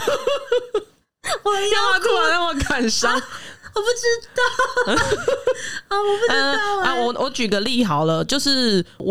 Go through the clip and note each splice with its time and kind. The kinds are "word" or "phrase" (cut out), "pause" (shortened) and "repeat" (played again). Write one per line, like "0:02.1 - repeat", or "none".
none